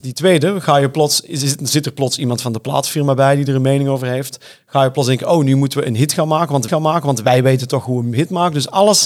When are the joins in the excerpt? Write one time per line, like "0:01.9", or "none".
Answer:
0:06.7